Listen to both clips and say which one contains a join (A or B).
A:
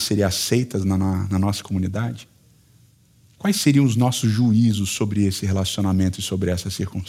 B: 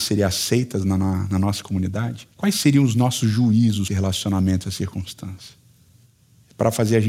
B